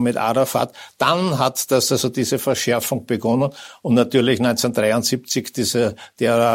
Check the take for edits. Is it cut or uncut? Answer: uncut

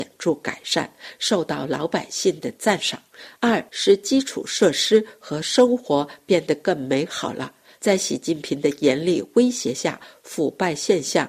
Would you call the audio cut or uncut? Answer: cut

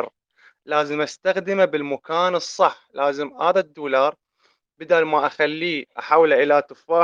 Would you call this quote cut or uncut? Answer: uncut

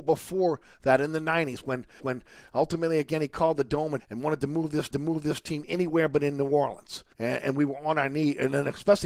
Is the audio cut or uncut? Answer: cut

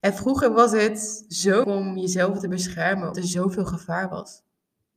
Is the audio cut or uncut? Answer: cut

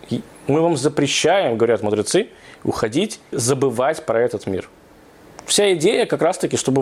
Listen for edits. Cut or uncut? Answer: cut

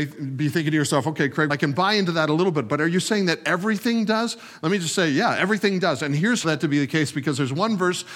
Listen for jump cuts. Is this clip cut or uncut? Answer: cut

